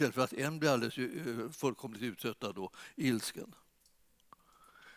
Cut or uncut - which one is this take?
uncut